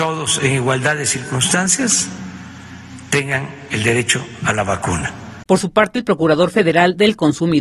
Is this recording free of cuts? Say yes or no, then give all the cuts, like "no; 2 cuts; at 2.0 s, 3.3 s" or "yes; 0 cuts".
no; 1 cut; at 5.5 s